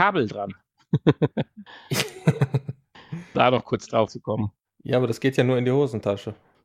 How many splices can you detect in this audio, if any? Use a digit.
2